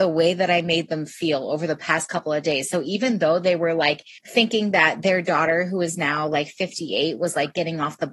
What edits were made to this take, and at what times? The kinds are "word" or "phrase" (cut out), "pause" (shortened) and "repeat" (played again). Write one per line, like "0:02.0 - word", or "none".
0:04.2 - pause